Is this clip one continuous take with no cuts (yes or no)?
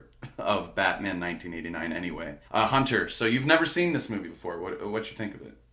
no